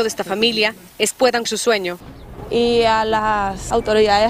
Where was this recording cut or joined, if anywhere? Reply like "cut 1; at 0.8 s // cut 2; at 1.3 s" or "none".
cut 1; at 1.1 s // cut 2; at 1.5 s